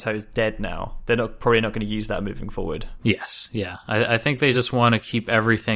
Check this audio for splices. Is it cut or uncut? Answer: uncut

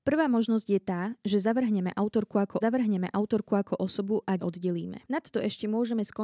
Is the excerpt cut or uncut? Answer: cut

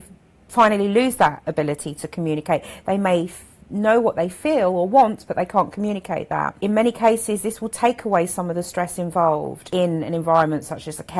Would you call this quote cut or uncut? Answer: uncut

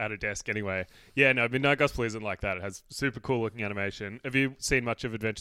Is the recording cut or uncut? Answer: uncut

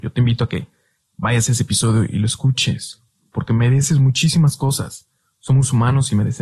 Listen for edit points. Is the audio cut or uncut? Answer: uncut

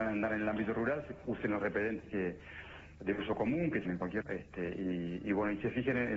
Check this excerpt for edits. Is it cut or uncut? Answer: cut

